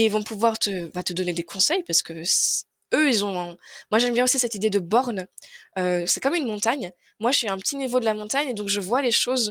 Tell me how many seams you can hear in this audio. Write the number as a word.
zero